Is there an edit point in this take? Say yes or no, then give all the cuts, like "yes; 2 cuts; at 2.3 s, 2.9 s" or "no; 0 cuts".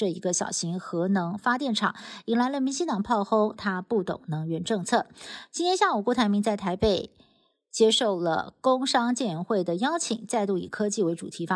no; 0 cuts